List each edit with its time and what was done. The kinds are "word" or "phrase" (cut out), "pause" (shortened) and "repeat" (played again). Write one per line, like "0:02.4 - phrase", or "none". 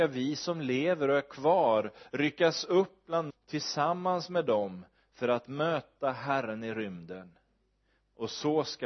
0:03.3 - word